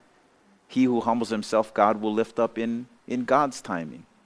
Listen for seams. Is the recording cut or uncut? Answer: uncut